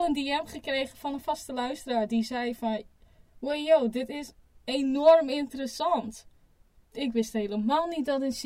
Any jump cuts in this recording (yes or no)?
no